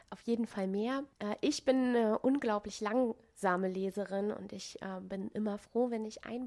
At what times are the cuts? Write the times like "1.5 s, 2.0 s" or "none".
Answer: 1.1 s